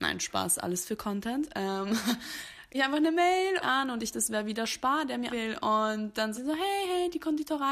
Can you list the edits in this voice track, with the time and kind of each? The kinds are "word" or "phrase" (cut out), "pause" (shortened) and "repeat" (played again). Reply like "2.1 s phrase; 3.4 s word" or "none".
2.7 s word; 3.6 s phrase; 4.1 s word; 5.3 s word; 6.3 s word